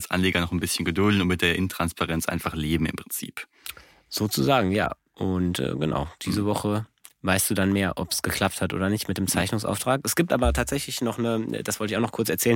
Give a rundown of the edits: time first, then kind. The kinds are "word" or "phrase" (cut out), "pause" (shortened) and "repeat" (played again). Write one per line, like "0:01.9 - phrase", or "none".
none